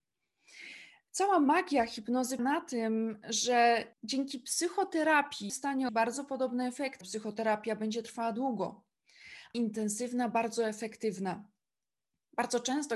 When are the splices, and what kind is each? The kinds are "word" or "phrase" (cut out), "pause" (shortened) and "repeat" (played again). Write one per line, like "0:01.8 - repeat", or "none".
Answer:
0:02.4 - word
0:03.9 - pause
0:05.5 - word
0:05.9 - word
0:07.0 - word
0:09.5 - phrase